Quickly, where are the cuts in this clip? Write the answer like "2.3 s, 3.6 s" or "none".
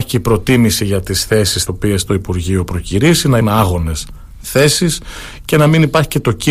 1.7 s, 3.4 s